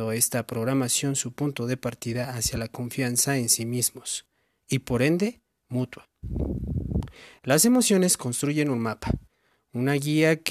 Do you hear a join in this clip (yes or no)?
no